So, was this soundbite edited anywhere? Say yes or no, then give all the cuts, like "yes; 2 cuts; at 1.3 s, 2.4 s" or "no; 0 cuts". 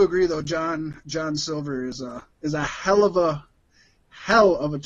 yes; 1 cut; at 2.3 s